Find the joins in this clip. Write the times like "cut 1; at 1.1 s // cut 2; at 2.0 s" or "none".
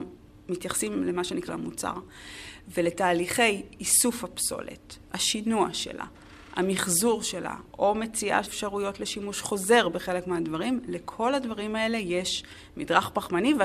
cut 1; at 1.5 s // cut 2; at 8.4 s